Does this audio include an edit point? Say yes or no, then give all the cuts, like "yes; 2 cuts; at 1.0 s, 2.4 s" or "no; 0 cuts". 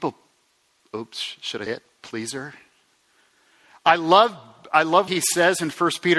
yes; 2 cuts; at 1.7 s, 5.1 s